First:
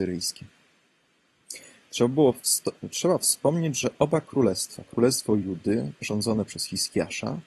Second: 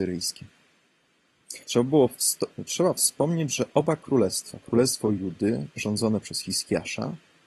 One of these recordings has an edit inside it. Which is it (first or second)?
second